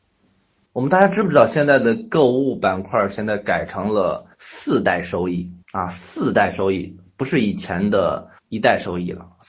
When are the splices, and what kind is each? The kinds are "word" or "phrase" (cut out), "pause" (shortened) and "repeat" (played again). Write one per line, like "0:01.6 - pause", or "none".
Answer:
0:04.3 - pause
0:05.6 - pause
0:08.4 - pause